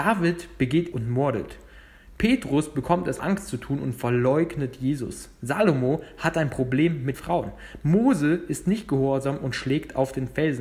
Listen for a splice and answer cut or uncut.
cut